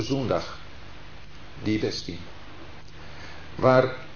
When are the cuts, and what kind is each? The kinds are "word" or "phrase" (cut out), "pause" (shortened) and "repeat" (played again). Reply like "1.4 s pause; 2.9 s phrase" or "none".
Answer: 1.8 s phrase